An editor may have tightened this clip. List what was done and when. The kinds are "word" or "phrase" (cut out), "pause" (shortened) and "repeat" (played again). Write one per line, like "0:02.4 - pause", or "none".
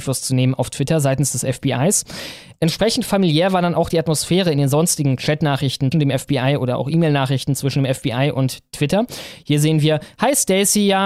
0:05.9 - word

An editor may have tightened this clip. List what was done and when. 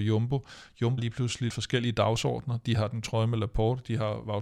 0:01.0 - word
0:01.5 - word
0:03.0 - word

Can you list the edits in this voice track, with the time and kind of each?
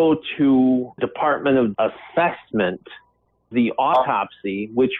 0:01.0 - word
0:01.7 - word
0:03.5 - word

